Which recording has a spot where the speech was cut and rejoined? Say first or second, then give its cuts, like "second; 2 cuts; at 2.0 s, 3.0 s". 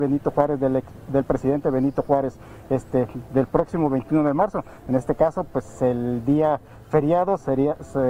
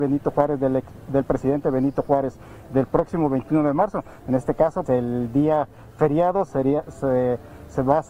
second; 2 cuts; at 2.7 s, 4.9 s